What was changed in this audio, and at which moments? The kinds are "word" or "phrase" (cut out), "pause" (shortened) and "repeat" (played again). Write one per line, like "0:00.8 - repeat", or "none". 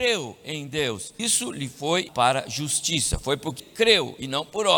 0:01.2 - word
0:02.1 - word
0:03.6 - word